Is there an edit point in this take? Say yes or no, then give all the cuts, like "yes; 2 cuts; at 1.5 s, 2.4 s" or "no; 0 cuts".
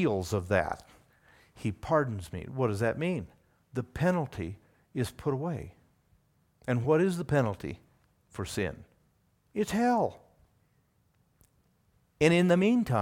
no; 0 cuts